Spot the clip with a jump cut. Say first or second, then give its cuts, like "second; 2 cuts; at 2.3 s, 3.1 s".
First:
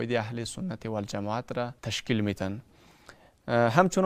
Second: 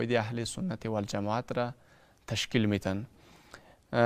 first; 1 cut; at 1.8 s